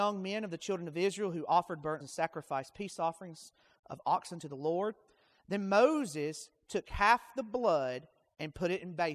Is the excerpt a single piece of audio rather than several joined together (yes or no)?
no